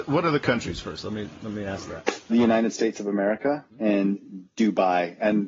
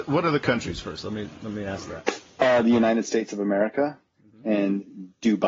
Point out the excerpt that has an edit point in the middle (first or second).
first